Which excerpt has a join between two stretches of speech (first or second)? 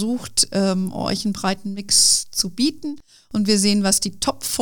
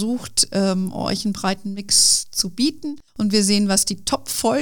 second